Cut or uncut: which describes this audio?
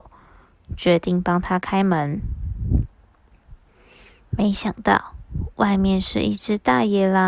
uncut